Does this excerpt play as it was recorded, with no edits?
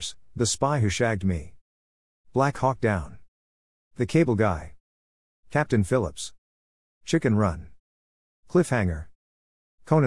yes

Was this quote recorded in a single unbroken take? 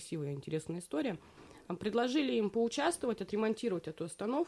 yes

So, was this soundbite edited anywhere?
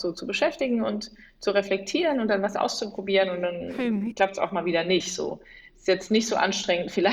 no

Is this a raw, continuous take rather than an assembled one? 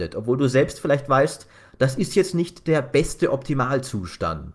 yes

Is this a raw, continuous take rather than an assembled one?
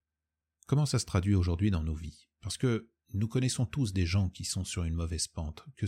yes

